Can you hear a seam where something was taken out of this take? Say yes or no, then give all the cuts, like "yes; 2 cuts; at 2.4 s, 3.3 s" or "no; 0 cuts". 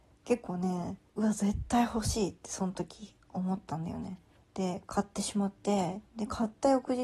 yes; 3 cuts; at 1.1 s, 4.4 s, 6.1 s